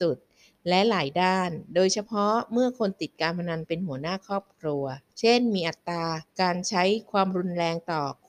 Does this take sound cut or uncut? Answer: cut